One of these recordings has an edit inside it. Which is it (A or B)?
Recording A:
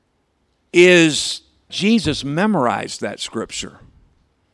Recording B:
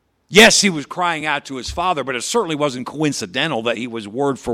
A